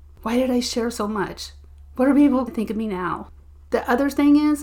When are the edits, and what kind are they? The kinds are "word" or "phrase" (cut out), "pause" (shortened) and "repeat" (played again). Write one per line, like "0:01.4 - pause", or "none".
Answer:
0:02.5 - word

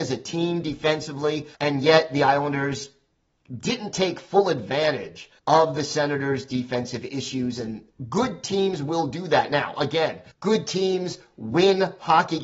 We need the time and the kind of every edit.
0:01.5 - pause
0:05.4 - pause
0:10.3 - pause

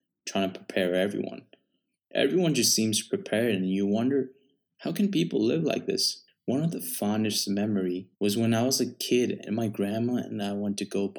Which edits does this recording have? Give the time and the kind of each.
0:08.1 - pause

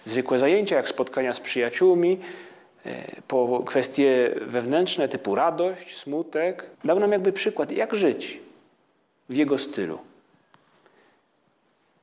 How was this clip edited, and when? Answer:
0:06.7 - pause

